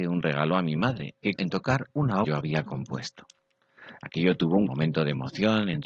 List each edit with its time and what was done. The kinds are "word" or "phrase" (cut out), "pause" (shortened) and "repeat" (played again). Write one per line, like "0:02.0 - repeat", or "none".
0:01.4 - word
0:02.2 - phrase
0:04.7 - word

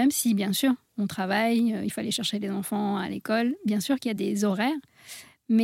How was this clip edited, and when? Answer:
none

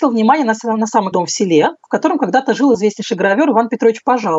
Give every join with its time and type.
0:01.1 - word

